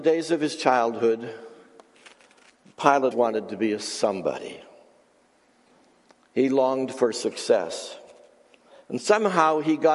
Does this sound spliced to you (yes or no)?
yes